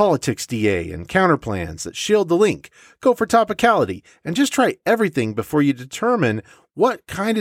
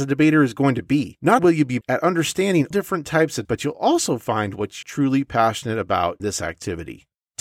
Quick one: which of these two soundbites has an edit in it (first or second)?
second